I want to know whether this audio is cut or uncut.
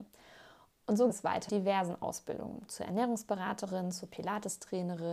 cut